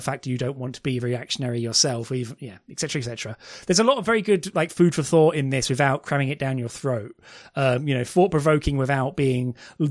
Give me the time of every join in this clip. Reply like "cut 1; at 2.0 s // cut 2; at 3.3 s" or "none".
none